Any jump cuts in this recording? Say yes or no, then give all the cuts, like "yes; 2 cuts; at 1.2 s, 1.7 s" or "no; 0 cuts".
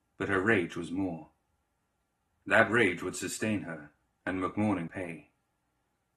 yes; 1 cut; at 4.9 s